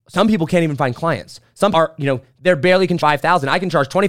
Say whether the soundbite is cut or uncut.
cut